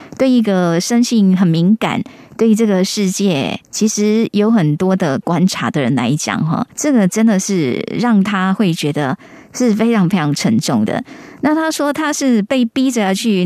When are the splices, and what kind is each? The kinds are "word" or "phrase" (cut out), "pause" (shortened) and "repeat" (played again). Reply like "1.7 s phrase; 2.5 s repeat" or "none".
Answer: 3.6 s pause; 6.7 s pause